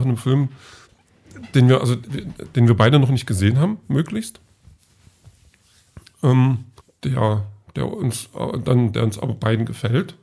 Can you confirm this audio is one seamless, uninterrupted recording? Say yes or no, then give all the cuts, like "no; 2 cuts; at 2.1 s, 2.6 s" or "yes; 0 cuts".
no; 1 cut; at 6.8 s